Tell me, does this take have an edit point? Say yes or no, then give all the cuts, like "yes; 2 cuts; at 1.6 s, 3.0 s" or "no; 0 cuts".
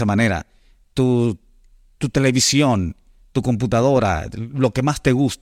no; 0 cuts